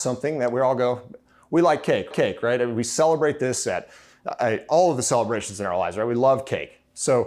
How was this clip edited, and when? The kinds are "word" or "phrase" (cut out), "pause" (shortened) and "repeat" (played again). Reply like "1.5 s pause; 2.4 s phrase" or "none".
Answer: 2.1 s repeat